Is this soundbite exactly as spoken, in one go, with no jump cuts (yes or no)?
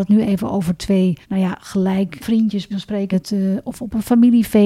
no